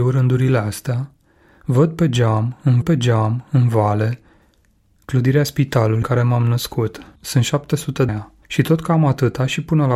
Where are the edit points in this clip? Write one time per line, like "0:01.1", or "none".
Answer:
0:02.8
0:06.0
0:07.2
0:08.1
0:08.4